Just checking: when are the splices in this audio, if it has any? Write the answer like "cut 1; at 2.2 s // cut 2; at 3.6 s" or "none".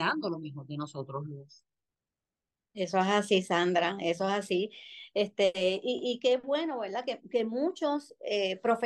none